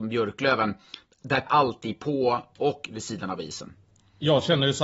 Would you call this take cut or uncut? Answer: cut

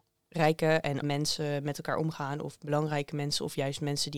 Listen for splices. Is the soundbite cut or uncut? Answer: cut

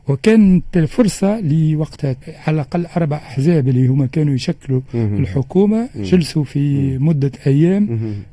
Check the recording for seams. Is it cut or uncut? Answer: cut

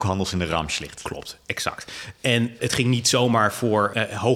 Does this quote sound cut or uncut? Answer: cut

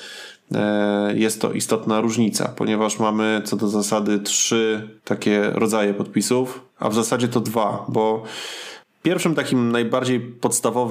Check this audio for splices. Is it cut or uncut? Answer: cut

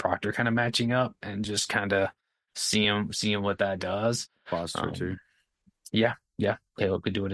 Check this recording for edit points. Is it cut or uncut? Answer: uncut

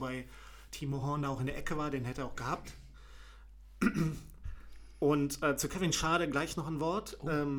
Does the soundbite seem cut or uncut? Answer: uncut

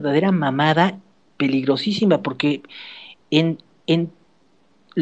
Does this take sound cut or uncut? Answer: uncut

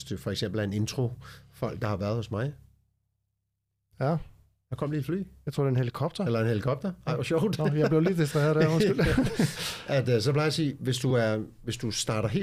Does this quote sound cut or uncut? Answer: uncut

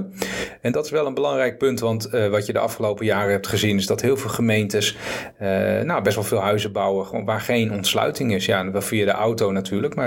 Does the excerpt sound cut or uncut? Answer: uncut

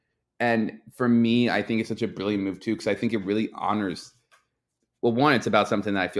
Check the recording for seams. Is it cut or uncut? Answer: uncut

